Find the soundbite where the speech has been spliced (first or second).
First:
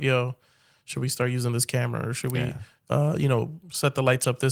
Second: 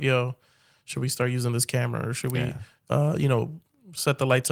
first